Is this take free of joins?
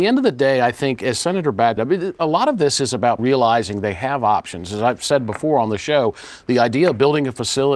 no; 2 cuts; at 1.8 s, 3.2 s

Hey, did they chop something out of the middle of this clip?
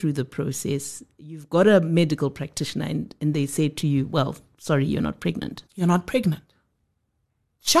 yes; 1 cut; at 5.7 s

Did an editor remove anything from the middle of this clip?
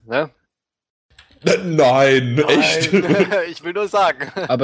no; 0 cuts

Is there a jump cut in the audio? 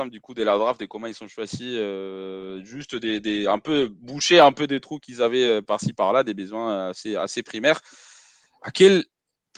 no; 0 cuts

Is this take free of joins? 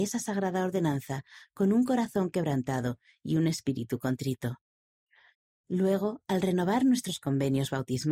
yes; 0 cuts

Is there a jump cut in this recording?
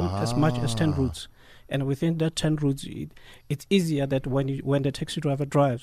no; 0 cuts

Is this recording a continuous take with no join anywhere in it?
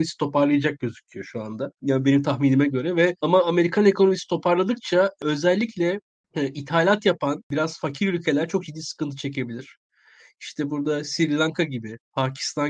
yes; 0 cuts

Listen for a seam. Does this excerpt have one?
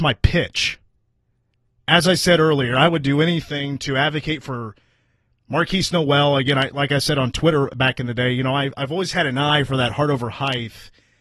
no; 0 cuts

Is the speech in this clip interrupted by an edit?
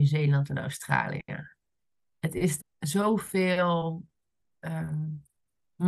yes; 1 cut; at 2.6 s

